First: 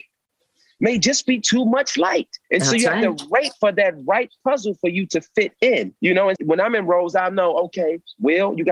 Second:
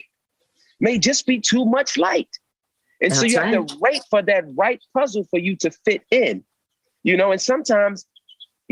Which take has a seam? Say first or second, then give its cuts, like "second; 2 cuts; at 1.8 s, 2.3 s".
first; 3 cuts; at 2.4 s, 6.0 s, 6.4 s